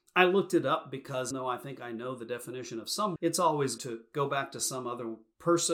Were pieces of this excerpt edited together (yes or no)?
yes